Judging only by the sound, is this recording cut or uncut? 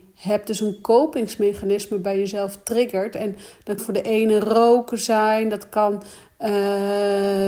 cut